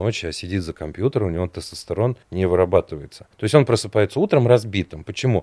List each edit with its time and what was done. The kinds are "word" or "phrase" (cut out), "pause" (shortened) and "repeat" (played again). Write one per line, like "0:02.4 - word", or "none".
0:02.2 - pause
0:03.3 - pause